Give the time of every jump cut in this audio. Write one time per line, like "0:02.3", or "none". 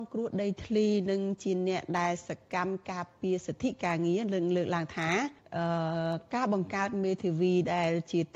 0:05.4